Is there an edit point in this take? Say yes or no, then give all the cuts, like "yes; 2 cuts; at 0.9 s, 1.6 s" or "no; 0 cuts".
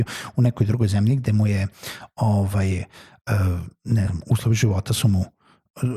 no; 0 cuts